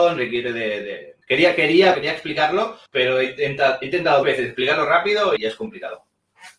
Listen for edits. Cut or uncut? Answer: cut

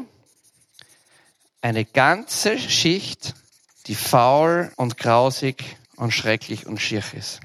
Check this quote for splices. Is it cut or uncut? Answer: cut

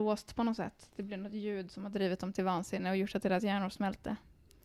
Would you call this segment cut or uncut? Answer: uncut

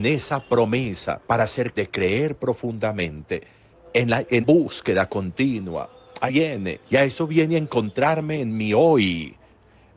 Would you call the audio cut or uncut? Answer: cut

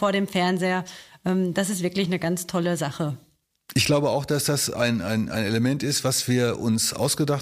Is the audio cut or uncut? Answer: uncut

